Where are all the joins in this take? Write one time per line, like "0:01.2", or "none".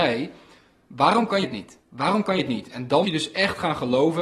0:01.4
0:01.8
0:02.4
0:03.0